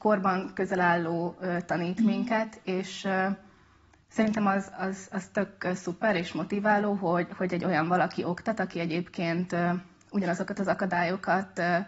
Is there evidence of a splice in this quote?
no; 0 cuts

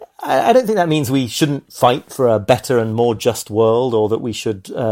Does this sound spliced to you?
no; 0 cuts

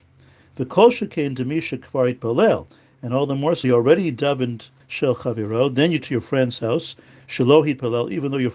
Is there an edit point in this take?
yes; 3 cuts; at 3.6 s, 4.8 s, 6.0 s

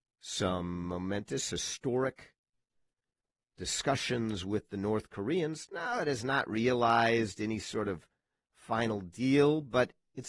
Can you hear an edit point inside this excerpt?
no; 0 cuts

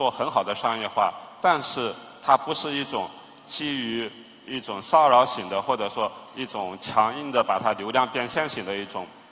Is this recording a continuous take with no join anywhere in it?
yes; 0 cuts

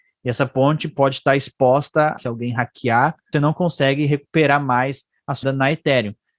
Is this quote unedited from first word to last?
no; 3 cuts; at 2.2 s, 3.3 s, 5.4 s

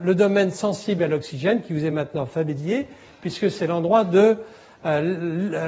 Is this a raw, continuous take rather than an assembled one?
yes; 0 cuts

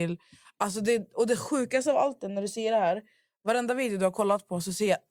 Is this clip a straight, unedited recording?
yes; 0 cuts

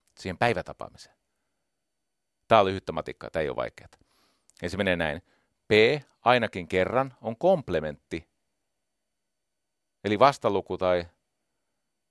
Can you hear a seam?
no; 0 cuts

